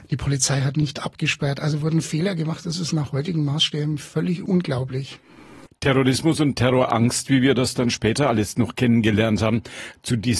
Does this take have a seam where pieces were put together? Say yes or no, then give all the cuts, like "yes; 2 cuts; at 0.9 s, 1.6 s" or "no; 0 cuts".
no; 0 cuts